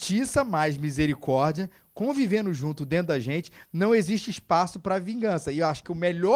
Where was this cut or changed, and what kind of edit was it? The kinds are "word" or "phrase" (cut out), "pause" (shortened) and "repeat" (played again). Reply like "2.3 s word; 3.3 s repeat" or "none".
none